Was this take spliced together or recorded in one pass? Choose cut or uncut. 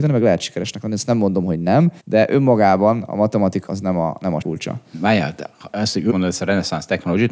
cut